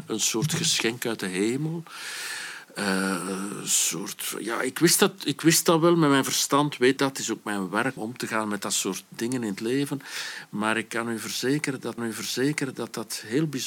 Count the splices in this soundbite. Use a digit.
3